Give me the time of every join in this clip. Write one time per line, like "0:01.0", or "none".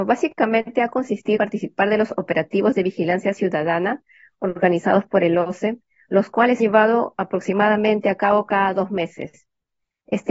0:01.4
0:06.6